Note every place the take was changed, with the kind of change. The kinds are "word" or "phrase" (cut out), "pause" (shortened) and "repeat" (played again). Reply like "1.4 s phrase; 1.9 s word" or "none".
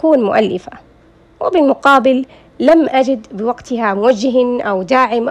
none